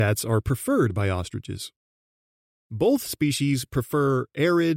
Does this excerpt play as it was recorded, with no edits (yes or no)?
yes